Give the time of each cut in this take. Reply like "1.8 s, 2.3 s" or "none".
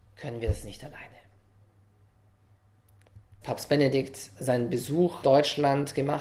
3.4 s, 5.2 s